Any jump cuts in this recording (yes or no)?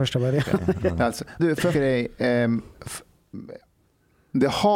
yes